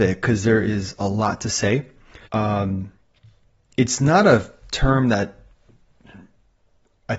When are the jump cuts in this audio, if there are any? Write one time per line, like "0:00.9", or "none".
0:02.3